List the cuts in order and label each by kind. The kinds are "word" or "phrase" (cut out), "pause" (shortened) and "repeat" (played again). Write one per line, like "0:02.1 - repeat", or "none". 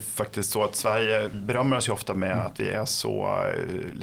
0:01.3 - word